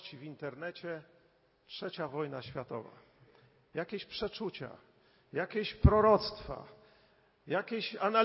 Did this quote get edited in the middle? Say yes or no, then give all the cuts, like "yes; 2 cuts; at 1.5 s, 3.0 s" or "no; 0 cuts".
no; 0 cuts